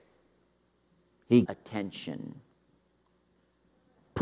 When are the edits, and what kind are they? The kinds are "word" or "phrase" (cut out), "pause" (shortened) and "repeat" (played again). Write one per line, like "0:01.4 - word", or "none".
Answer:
0:01.4 - phrase